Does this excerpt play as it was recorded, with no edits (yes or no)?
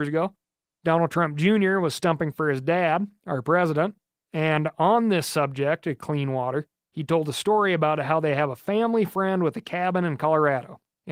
yes